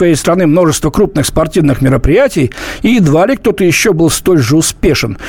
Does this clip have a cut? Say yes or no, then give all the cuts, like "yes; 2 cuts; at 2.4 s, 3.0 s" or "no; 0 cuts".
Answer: no; 0 cuts